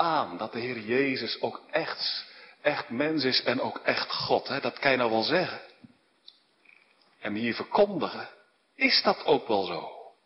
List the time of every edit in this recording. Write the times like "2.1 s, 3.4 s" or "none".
none